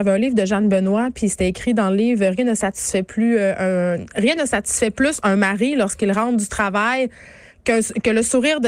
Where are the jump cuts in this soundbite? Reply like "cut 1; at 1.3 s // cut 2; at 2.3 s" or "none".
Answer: none

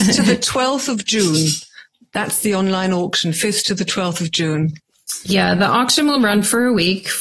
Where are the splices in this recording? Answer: none

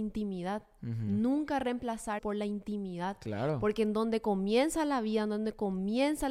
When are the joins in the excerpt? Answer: cut 1; at 2.2 s

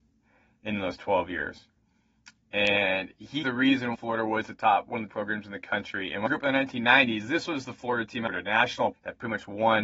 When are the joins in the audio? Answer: cut 1; at 3.4 s // cut 2; at 3.9 s // cut 3; at 5.1 s // cut 4; at 6.3 s // cut 5; at 8.3 s // cut 6; at 8.9 s

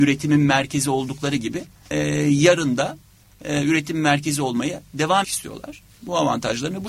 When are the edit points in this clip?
cut 1; at 1.9 s // cut 2; at 5.2 s

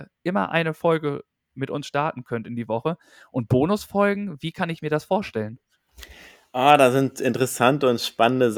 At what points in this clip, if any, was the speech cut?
none

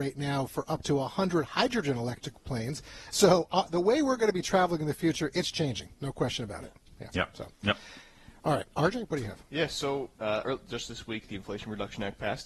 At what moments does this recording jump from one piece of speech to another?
none

